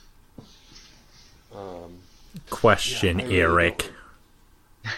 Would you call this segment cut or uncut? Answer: cut